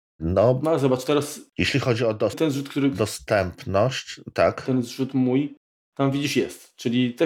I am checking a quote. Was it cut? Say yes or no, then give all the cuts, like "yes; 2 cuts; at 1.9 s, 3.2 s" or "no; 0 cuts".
yes; 1 cut; at 2.3 s